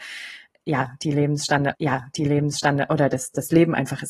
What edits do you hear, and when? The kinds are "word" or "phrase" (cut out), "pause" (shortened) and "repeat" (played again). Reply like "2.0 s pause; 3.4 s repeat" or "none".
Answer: 1.7 s repeat